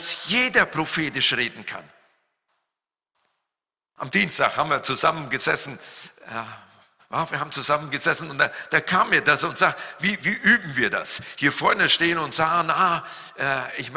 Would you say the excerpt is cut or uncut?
uncut